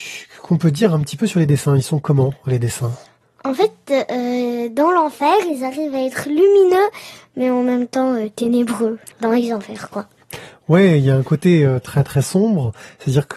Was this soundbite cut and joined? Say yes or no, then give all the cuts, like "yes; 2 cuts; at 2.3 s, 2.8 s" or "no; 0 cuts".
no; 0 cuts